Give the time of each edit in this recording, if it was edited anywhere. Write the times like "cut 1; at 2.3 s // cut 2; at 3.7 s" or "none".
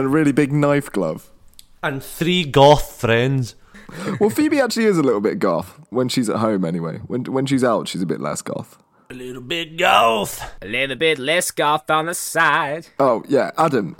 cut 1; at 5.9 s